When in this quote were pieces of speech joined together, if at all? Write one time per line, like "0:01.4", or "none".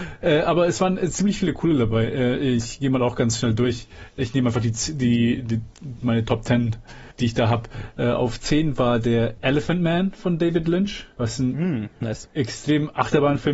0:07.1